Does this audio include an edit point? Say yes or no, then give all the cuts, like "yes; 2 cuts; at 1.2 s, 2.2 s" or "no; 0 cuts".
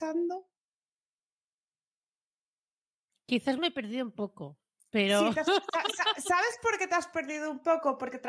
no; 0 cuts